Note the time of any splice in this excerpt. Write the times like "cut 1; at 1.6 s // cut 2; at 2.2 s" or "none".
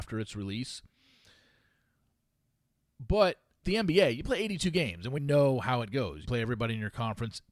cut 1; at 3.6 s // cut 2; at 5.2 s // cut 3; at 6.2 s